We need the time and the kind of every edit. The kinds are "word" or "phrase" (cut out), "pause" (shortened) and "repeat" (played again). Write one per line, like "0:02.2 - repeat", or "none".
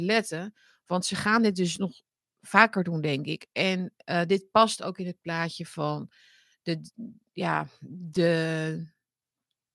none